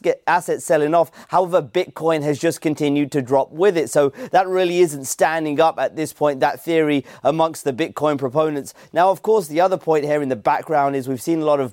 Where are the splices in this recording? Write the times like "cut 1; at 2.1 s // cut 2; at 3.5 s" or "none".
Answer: none